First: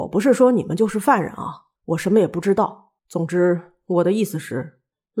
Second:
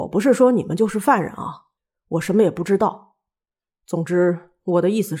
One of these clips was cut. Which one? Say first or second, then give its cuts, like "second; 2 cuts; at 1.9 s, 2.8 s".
first; 2 cuts; at 1.8 s, 3.0 s